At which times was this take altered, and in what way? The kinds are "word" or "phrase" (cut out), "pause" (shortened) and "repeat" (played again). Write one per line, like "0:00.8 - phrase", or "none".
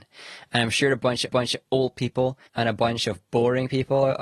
0:01.3 - repeat
0:02.5 - pause